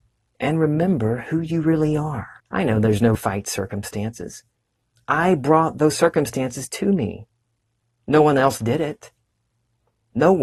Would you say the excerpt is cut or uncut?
cut